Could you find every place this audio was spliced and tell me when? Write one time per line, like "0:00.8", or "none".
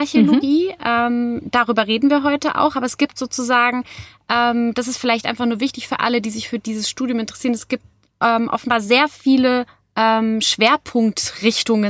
none